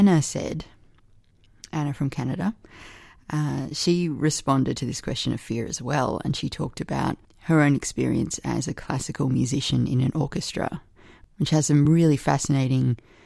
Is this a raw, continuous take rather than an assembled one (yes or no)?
yes